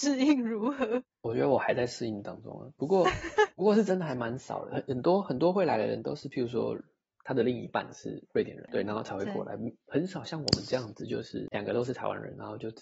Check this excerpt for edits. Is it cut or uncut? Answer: uncut